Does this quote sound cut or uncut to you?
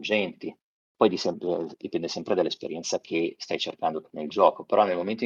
uncut